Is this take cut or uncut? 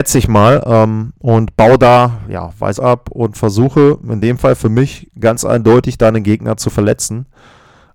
cut